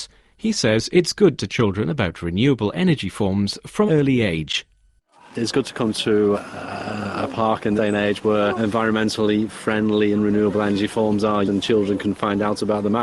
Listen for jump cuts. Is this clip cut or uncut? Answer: cut